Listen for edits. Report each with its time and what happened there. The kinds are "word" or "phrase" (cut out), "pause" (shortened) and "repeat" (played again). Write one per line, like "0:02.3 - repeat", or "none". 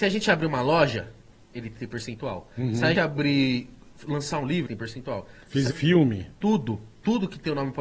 0:01.8 - word
0:02.9 - word
0:04.7 - word
0:05.7 - word